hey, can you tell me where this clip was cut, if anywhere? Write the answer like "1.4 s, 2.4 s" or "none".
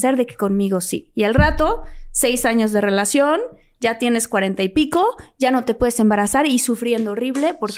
none

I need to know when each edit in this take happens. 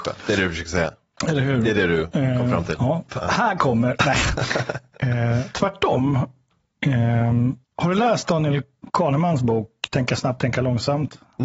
7.6 s

